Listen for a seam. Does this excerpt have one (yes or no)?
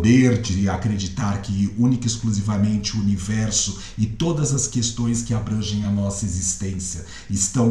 no